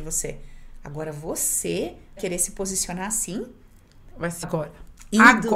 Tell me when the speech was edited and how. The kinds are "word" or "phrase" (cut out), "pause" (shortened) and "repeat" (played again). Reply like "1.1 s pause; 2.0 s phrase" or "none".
2.2 s word; 4.4 s word